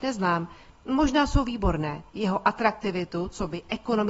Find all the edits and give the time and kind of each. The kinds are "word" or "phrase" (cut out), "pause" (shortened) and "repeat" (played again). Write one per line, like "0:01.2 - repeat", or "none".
0:02.1 - pause